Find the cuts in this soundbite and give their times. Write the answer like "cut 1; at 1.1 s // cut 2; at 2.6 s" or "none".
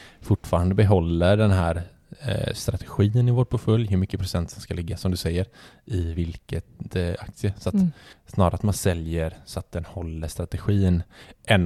none